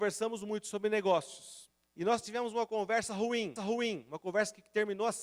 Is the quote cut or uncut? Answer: cut